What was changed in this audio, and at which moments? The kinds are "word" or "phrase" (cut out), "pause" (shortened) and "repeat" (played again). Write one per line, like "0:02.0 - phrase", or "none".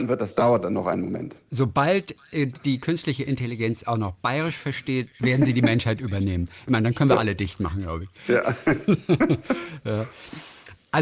none